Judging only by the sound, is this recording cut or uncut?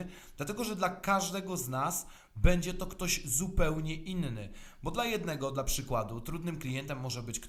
uncut